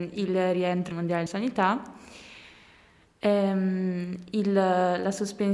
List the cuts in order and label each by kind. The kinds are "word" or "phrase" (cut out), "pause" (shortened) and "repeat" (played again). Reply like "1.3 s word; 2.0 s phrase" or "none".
0.9 s word; 1.3 s word